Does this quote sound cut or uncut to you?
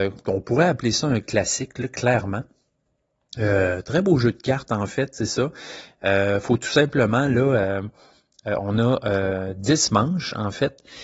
uncut